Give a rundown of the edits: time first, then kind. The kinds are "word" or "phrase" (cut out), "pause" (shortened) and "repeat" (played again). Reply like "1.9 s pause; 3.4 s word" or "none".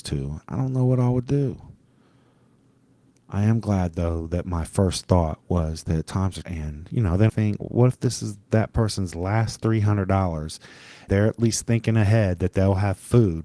6.4 s word; 7.3 s word; 11.1 s word